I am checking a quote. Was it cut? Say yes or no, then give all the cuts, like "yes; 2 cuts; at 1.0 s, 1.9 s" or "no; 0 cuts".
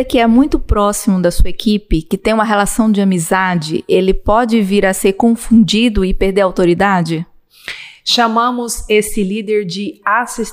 no; 0 cuts